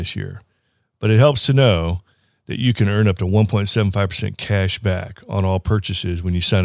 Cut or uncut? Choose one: uncut